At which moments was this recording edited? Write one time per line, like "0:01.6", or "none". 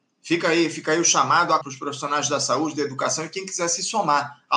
0:01.6